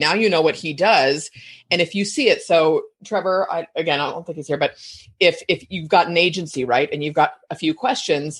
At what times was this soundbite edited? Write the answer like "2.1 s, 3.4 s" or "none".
none